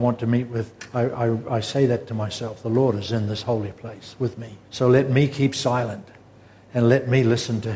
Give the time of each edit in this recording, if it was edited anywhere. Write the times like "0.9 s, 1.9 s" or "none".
4.6 s